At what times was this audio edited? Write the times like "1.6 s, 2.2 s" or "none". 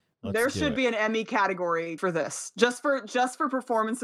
2.0 s